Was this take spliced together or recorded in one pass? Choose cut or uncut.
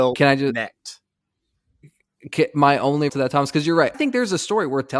cut